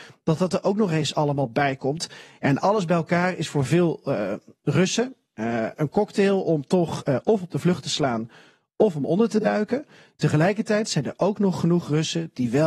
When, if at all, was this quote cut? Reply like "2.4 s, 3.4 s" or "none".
none